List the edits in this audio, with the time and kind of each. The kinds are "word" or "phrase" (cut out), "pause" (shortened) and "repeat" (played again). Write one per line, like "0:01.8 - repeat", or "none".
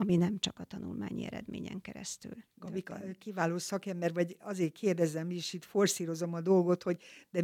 0:02.5 - pause